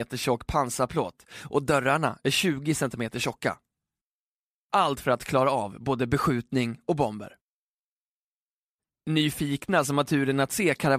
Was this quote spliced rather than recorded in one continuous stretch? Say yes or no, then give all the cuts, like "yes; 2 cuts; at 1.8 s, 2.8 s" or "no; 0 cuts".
no; 0 cuts